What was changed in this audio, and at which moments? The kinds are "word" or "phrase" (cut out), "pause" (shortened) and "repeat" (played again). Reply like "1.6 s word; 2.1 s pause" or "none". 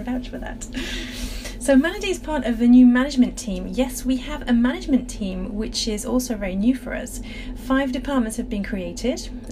none

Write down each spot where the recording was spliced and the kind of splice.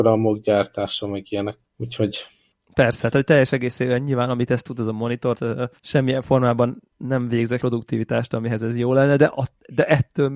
1.6 s pause; 3.1 s word; 5.3 s word; 5.8 s pause; 6.9 s word; 7.6 s phrase

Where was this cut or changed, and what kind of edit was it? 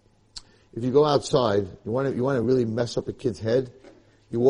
none

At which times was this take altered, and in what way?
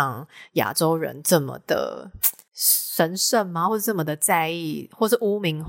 none

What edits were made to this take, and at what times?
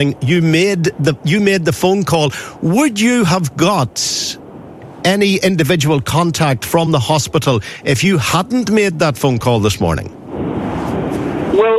none

